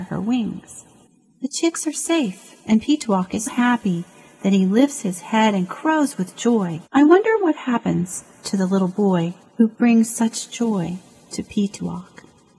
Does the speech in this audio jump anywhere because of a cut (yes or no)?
yes